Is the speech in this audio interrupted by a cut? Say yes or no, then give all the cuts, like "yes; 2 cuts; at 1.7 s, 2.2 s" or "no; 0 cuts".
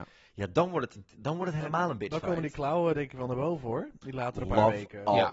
no; 0 cuts